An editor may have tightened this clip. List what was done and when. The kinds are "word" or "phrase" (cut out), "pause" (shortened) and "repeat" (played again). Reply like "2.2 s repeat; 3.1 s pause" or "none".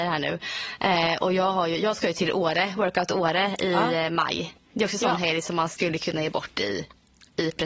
none